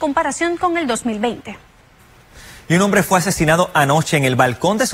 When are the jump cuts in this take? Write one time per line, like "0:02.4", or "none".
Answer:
none

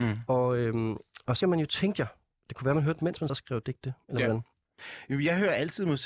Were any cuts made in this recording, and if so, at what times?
0:01.4
0:03.0
0:03.3

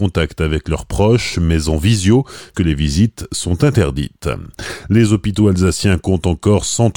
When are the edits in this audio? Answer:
0:02.5

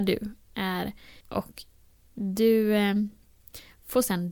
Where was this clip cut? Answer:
0:01.2

